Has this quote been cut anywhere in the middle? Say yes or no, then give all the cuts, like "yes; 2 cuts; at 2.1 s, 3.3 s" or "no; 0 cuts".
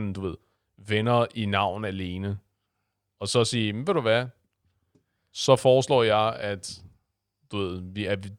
no; 0 cuts